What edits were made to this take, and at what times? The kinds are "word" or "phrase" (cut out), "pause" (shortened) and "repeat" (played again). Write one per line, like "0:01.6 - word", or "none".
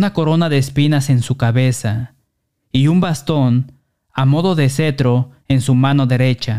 none